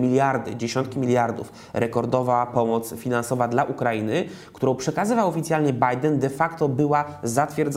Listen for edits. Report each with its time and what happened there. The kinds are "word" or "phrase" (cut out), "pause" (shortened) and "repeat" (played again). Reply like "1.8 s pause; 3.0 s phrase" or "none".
none